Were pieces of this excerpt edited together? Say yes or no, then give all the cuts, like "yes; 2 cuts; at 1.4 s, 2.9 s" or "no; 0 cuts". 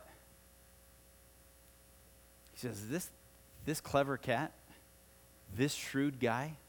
no; 0 cuts